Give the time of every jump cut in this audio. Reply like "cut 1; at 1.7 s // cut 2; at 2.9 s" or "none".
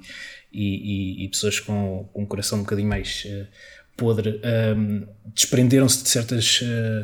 none